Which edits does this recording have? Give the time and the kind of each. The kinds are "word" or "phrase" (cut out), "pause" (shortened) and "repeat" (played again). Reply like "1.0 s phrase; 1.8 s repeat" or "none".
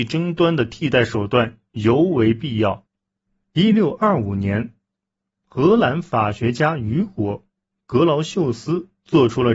none